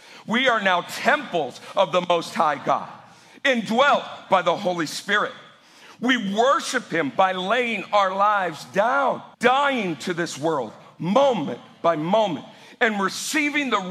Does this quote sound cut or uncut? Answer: cut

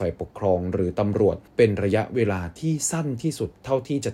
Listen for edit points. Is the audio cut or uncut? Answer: cut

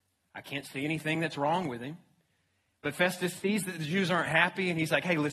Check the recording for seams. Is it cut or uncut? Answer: uncut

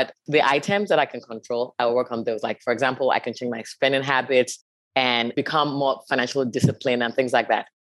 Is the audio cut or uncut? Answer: uncut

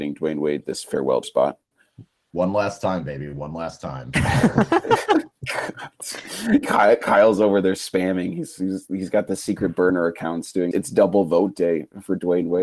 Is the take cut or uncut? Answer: cut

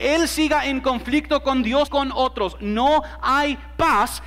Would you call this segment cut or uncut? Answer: cut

